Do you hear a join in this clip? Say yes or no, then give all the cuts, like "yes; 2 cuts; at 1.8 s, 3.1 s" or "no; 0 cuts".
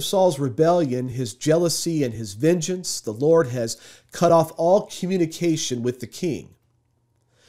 no; 0 cuts